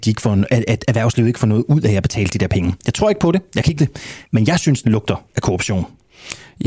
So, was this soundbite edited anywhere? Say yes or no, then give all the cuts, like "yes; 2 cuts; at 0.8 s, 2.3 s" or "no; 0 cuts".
yes; 3 cuts; at 3.8 s, 4.2 s, 4.8 s